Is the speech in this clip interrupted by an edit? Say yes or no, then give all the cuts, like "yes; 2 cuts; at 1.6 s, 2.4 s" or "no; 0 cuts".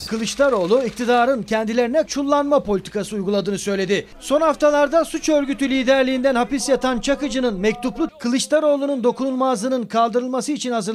yes; 2 cuts; at 2.1 s, 8.1 s